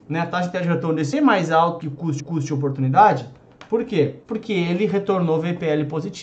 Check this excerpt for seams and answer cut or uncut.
cut